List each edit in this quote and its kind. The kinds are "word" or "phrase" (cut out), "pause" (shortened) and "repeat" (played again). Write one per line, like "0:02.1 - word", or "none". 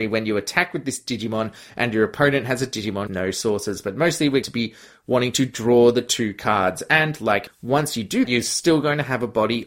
0:03.1 - word
0:04.4 - word
0:07.5 - word
0:08.2 - word